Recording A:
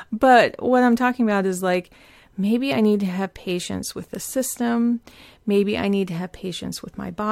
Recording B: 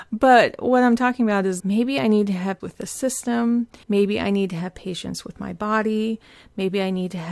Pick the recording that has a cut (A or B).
B